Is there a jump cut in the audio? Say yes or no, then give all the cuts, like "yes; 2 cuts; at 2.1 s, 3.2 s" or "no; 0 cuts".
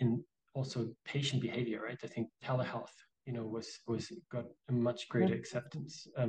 yes; 2 cuts; at 2.3 s, 4.2 s